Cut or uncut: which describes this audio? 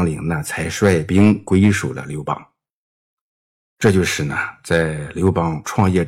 uncut